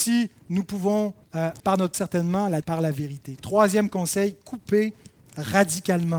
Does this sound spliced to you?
yes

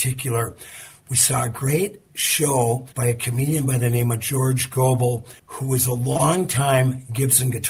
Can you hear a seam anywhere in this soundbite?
yes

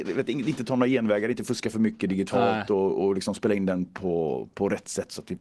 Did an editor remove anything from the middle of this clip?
no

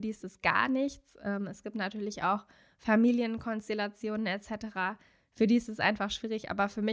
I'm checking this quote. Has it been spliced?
no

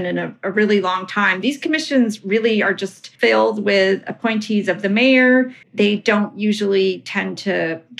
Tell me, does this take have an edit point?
yes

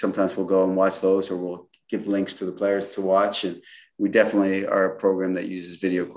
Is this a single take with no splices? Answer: yes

